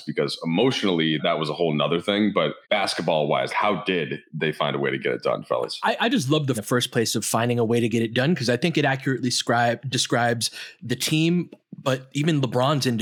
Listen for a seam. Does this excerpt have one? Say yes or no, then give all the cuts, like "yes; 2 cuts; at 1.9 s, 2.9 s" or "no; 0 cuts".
yes; 4 cuts; at 1.2 s, 2.6 s, 3.5 s, 6.5 s